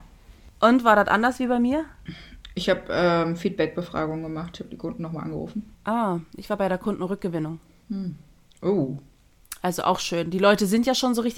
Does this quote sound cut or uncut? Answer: cut